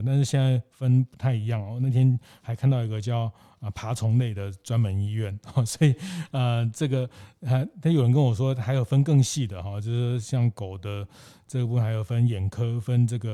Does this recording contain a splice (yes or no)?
no